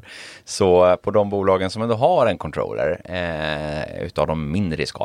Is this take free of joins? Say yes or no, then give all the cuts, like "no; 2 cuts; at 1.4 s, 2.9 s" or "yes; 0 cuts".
yes; 0 cuts